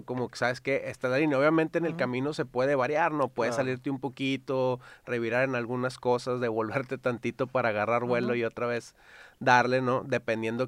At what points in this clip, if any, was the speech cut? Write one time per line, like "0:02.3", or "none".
none